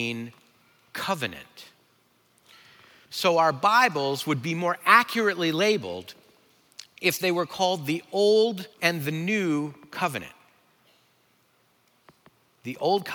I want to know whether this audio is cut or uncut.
cut